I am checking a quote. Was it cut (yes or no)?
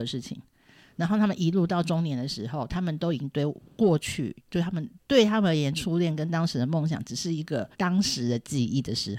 yes